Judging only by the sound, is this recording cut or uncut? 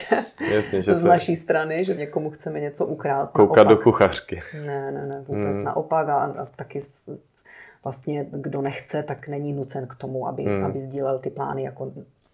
cut